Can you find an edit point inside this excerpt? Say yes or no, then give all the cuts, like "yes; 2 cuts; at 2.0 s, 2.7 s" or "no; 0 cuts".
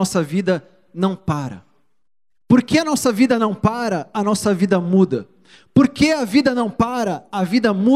no; 0 cuts